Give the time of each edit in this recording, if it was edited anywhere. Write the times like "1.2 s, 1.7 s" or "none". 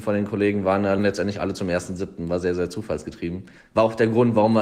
1.0 s, 3.6 s